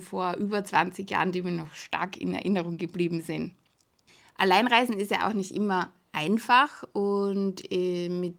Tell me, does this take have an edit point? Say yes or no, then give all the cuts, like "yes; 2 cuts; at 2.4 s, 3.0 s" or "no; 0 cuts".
no; 0 cuts